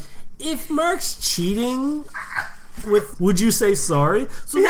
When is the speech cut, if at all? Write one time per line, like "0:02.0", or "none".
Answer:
0:03.1